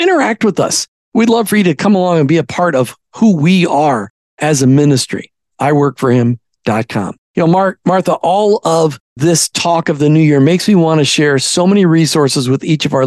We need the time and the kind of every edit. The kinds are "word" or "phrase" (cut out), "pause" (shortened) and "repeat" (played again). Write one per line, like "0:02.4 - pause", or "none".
0:07.2 - pause
0:09.1 - pause